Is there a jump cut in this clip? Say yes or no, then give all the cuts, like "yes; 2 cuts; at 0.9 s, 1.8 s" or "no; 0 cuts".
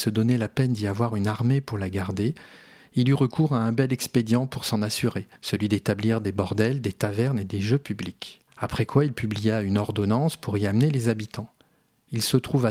yes; 2 cuts; at 5.4 s, 8.5 s